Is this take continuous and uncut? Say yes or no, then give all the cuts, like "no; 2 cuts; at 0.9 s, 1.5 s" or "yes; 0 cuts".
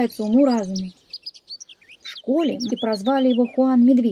no; 1 cut; at 2.7 s